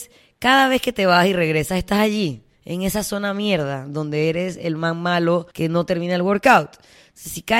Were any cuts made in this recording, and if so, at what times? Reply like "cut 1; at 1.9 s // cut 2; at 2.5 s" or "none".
cut 1; at 5.5 s